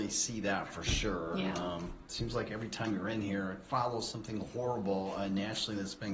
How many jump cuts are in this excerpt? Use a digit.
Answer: 0